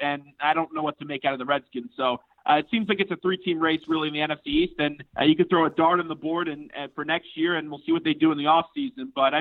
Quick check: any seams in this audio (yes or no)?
yes